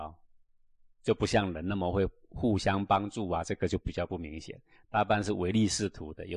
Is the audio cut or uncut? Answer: uncut